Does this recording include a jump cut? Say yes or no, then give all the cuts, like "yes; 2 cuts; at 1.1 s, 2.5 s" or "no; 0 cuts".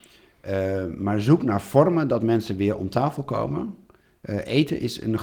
no; 0 cuts